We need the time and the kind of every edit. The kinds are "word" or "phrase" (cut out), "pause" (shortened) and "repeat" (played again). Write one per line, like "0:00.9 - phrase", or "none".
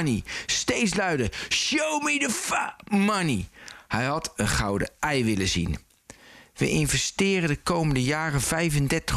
none